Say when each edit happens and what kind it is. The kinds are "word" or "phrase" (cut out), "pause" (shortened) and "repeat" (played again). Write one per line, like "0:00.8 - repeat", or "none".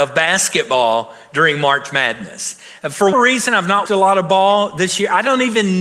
0:03.1 - word
0:03.9 - word

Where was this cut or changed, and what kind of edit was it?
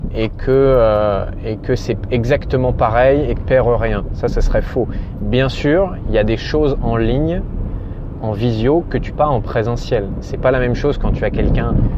0:03.4 - phrase
0:09.1 - word

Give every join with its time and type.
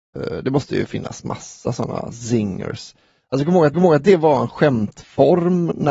0:03.7 - repeat

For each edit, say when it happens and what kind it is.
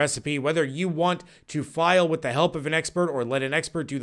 none

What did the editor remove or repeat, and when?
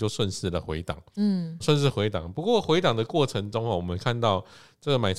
0:01.6 - word

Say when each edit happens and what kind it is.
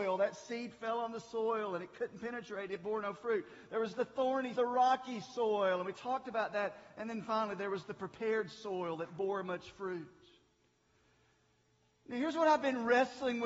0:04.6 - phrase

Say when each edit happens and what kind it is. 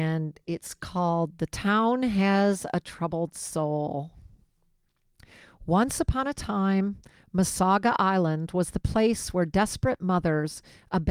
none

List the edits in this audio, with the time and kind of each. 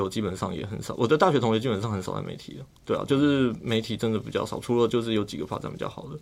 0:02.7 - pause

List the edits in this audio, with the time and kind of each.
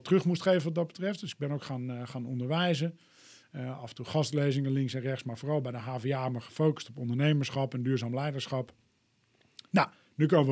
none

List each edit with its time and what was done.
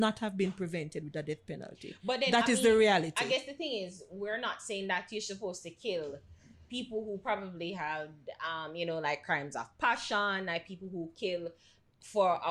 none

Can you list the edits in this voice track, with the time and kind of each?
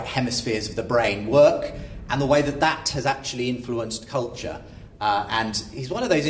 none

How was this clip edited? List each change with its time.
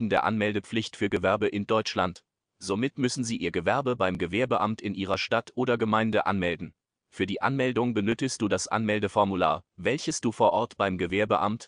none

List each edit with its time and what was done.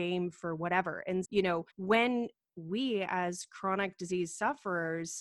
0:01.2 - word
0:01.7 - pause

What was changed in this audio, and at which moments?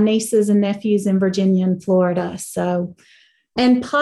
none

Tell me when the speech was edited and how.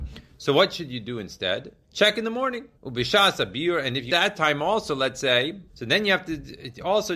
0:01.8 - pause
0:02.7 - pause
0:04.1 - word
0:05.7 - pause

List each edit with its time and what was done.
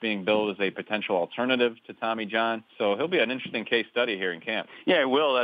none

